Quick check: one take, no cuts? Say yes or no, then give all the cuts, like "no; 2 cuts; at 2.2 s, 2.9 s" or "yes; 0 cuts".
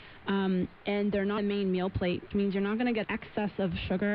no; 3 cuts; at 1.4 s, 2.3 s, 3.0 s